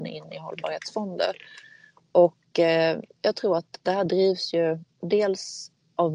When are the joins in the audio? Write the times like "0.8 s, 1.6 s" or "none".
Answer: none